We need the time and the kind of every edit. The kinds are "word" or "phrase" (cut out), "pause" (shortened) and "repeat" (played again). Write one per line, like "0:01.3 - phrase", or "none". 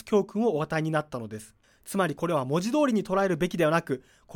0:01.6 - pause